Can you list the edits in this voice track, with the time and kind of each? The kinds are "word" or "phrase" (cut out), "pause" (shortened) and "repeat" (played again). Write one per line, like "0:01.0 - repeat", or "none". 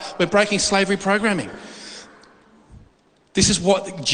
none